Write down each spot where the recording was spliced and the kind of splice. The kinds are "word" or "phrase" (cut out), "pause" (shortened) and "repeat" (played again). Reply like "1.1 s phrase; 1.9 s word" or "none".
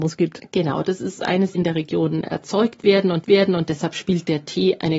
1.5 s phrase; 3.2 s repeat